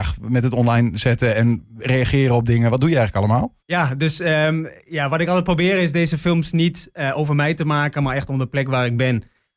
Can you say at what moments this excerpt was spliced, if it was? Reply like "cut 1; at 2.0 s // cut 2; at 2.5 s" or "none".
cut 1; at 3.6 s